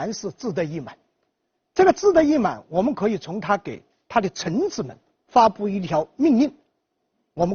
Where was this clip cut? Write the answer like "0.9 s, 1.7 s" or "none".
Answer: none